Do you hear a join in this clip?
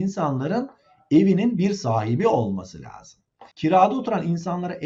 yes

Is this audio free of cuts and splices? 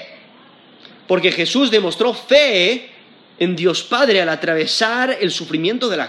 yes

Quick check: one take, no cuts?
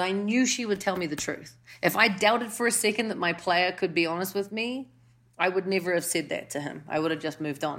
yes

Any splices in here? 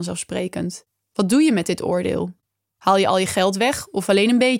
no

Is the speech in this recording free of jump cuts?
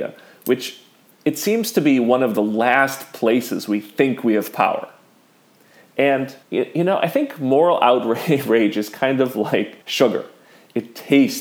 no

